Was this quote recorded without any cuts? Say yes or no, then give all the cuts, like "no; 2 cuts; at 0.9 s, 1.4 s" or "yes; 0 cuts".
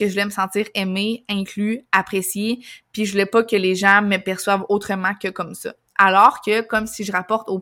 yes; 0 cuts